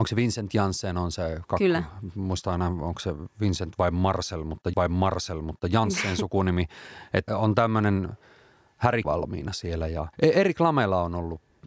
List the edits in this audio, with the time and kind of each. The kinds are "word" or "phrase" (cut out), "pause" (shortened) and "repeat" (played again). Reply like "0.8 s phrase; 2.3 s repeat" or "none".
4.7 s repeat; 7.3 s word; 9.0 s phrase; 10.1 s pause